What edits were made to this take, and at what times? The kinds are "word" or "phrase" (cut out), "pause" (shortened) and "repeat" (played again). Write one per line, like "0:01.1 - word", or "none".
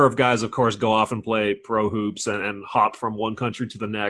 none